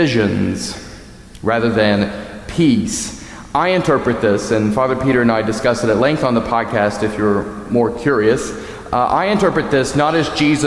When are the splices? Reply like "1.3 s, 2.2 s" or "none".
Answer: none